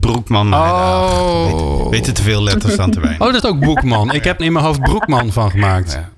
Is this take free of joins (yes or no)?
no